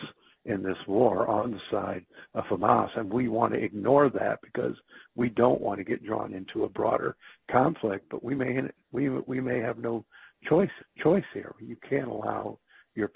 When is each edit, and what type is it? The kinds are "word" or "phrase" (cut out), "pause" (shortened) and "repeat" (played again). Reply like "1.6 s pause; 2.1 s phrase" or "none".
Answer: 10.8 s repeat